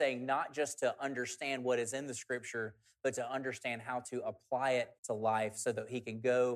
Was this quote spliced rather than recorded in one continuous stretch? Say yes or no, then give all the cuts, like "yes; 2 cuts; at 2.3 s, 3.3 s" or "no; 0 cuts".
yes; 1 cut; at 5.0 s